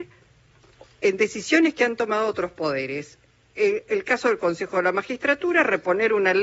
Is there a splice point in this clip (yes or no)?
no